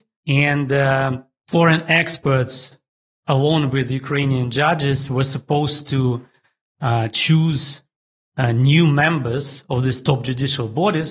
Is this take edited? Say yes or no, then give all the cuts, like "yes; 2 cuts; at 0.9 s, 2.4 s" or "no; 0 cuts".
no; 0 cuts